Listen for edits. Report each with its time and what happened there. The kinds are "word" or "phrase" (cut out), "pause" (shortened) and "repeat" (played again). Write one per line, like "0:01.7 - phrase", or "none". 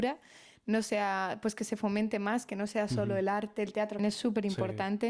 0:04.0 - word